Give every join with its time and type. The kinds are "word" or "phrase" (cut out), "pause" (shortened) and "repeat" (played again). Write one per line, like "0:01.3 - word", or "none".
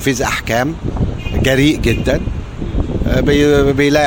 none